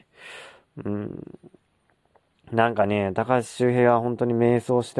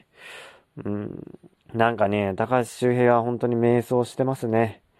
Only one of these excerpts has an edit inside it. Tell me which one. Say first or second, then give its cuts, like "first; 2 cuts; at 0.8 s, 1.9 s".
second; 1 cut; at 1.5 s